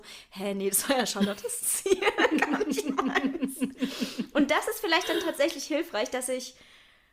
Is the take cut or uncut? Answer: uncut